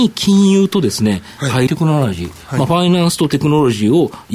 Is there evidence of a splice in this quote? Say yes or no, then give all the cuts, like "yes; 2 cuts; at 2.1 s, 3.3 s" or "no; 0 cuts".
yes; 1 cut; at 1.7 s